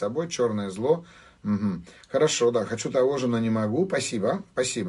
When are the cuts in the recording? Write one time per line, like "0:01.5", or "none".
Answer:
none